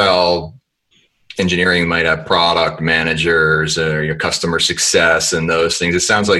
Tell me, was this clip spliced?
yes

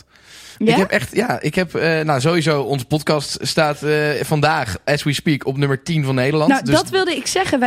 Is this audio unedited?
yes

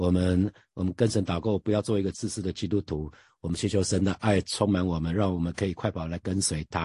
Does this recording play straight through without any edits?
yes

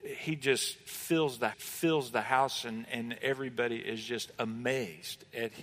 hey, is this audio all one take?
no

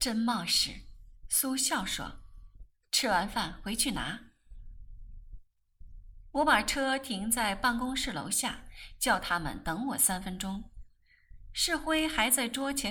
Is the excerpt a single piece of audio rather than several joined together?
no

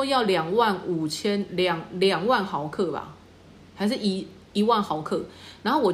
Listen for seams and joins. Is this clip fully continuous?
yes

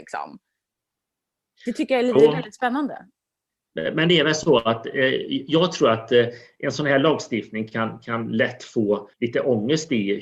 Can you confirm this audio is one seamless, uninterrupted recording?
no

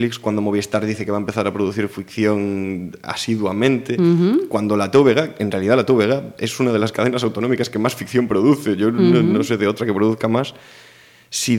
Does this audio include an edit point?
no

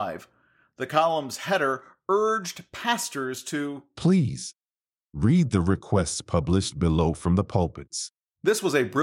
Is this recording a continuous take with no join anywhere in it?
yes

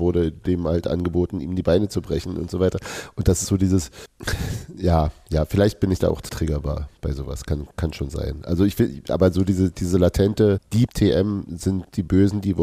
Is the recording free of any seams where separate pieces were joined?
no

